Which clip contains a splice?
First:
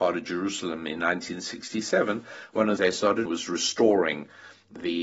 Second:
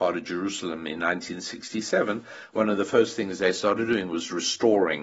first; 2 cuts; at 2.8 s, 3.3 s

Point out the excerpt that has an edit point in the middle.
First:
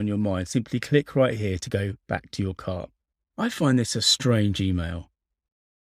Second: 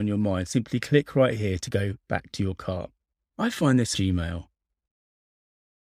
second; 1 cut; at 3.9 s

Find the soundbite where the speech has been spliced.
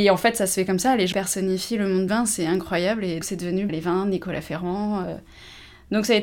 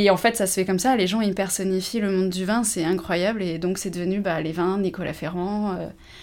first; 4 cuts; at 1.1 s, 2.1 s, 3.2 s, 3.7 s

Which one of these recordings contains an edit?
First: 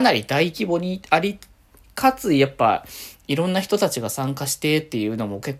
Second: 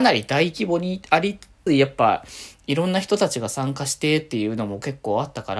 second; 1 cut; at 1.7 s

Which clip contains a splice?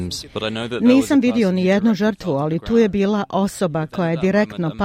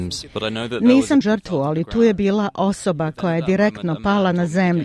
second; 1 cut; at 1.2 s

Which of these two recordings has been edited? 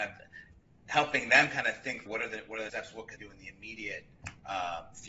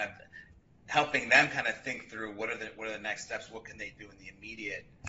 first; 3 cuts; at 2.1 s, 2.7 s, 3.2 s

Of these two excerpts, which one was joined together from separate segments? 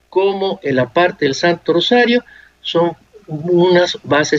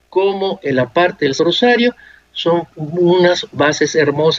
second; 2 cuts; at 1.4 s, 2.7 s

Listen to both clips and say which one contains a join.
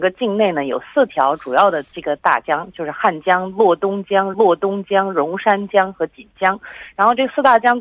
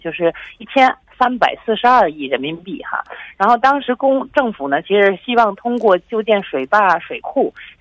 first; 2 cuts; at 1.9 s, 4.3 s

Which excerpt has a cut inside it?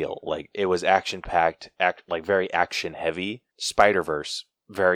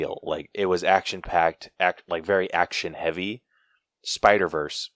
first; 1 cut; at 3.5 s

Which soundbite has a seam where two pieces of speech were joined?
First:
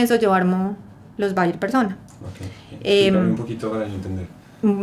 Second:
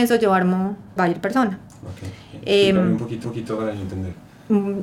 second; 2 cuts; at 1.0 s, 3.2 s

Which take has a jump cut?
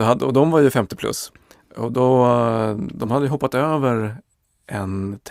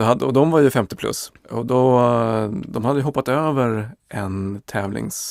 second; 2 cuts; at 1.4 s, 4.0 s

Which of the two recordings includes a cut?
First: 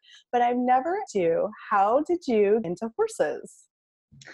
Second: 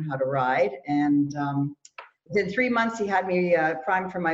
first; 2 cuts; at 1.1 s, 2.6 s

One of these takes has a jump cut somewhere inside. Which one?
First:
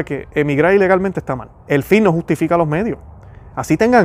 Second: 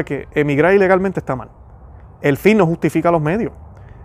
first; 1 cut; at 1.6 s

